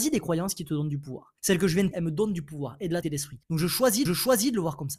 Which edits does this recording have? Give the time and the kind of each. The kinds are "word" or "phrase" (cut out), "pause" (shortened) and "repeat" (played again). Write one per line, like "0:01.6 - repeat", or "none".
0:01.4 - pause
0:01.9 - word
0:03.0 - word
0:03.4 - pause
0:04.1 - repeat